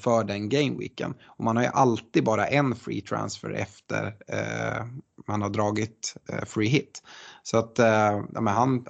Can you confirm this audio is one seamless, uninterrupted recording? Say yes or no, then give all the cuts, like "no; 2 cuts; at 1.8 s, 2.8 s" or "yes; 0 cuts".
yes; 0 cuts